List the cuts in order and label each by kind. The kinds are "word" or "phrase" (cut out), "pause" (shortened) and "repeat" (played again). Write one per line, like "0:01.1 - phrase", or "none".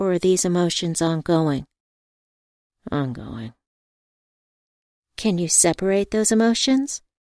none